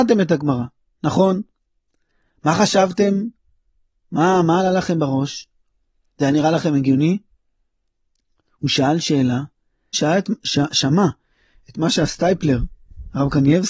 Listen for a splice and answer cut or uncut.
cut